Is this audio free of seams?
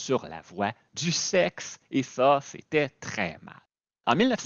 yes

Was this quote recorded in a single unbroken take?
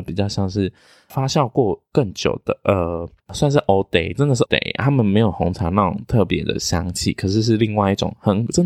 no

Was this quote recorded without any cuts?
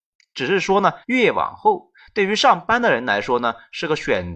no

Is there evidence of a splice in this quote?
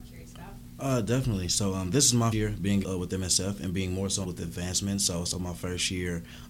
yes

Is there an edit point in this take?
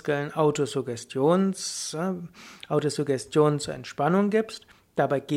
no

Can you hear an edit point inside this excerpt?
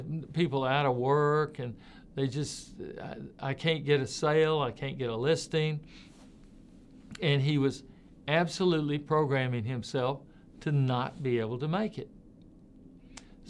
no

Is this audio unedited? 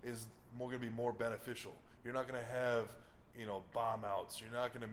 yes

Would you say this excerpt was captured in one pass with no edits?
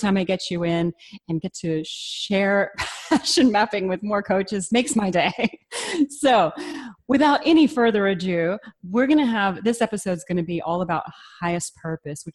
no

